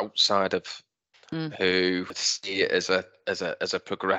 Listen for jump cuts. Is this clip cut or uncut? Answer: cut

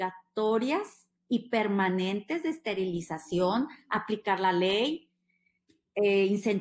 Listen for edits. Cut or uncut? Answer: uncut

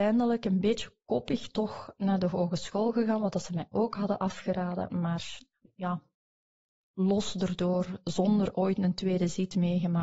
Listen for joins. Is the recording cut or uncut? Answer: uncut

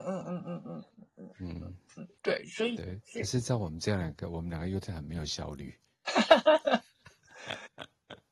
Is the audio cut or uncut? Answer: cut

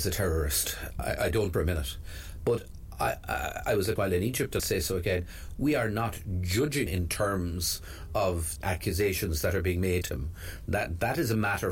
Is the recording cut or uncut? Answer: cut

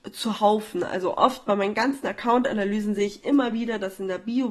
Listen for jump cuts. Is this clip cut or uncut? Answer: uncut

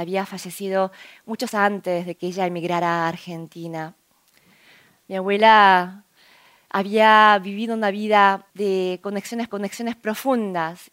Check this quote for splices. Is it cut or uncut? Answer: cut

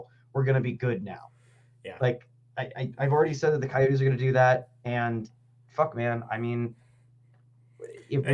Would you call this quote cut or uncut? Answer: uncut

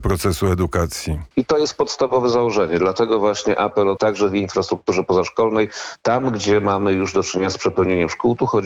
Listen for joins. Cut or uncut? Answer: cut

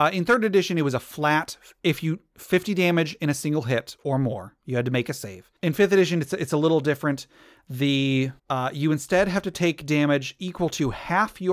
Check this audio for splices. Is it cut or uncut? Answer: cut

